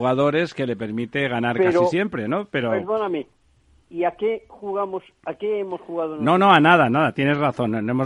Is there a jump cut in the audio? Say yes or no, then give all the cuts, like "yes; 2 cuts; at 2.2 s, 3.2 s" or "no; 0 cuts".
no; 0 cuts